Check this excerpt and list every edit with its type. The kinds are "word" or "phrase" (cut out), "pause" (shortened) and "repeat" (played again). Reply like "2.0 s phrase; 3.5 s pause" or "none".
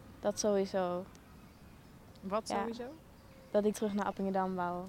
3.7 s word